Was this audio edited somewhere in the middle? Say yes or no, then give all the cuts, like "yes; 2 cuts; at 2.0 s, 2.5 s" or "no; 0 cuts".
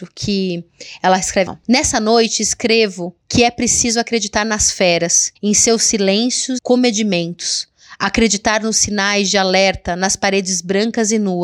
yes; 3 cuts; at 1.5 s, 5.4 s, 6.6 s